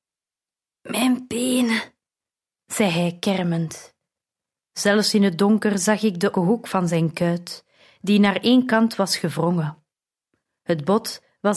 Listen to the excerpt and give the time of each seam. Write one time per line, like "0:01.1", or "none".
0:06.3